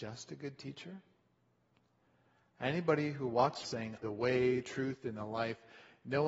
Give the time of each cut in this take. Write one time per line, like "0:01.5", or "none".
0:03.6
0:04.0
0:04.6